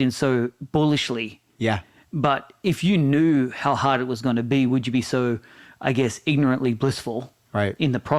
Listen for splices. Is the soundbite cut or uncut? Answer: uncut